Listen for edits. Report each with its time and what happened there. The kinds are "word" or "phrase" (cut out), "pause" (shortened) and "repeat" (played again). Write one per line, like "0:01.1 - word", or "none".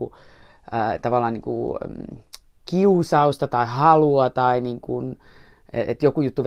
none